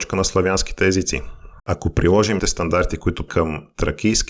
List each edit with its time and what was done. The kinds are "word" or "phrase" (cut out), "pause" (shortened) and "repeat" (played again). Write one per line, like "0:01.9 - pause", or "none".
0:01.6 - pause
0:02.4 - word
0:03.3 - word